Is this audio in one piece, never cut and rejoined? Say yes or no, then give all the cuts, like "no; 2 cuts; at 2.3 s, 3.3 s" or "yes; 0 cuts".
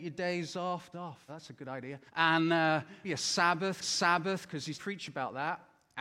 no; 6 cuts; at 0.9 s, 1.3 s, 2.1 s, 3.0 s, 3.8 s, 4.7 s